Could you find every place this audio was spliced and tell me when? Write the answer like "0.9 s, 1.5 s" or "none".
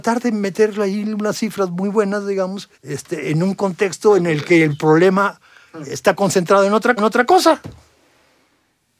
2.7 s, 7.0 s